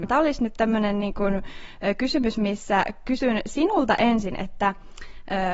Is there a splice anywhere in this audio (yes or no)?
no